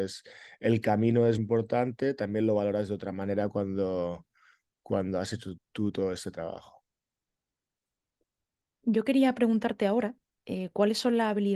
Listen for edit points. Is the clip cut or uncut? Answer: cut